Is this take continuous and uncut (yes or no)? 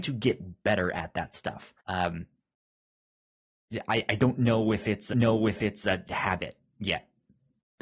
no